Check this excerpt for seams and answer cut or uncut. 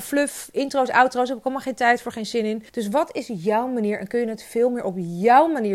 cut